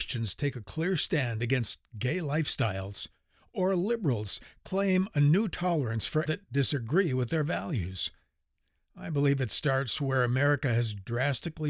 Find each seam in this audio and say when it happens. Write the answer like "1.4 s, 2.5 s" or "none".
6.3 s